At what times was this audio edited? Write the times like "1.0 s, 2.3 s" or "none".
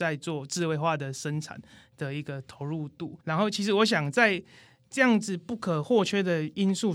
3.2 s